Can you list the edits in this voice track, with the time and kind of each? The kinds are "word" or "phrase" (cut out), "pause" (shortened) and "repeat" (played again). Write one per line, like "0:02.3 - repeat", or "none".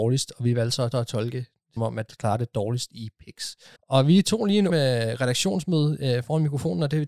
0:00.9 - repeat
0:01.8 - word
0:02.1 - word
0:03.8 - pause
0:04.7 - word